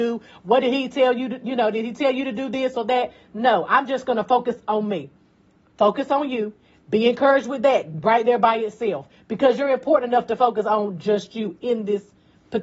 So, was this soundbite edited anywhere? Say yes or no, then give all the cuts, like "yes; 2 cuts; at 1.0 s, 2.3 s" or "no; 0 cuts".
no; 0 cuts